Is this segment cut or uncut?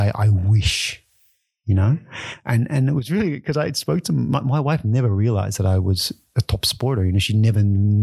uncut